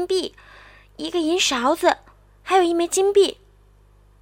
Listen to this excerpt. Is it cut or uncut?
uncut